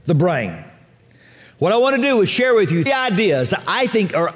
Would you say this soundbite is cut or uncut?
cut